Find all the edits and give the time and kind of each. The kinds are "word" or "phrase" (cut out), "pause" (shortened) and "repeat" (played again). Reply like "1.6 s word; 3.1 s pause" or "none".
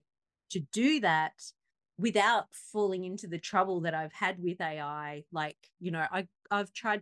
none